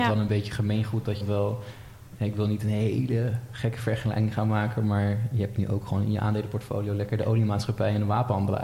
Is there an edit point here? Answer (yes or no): yes